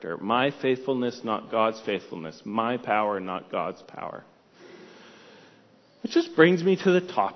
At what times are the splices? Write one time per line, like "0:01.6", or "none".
none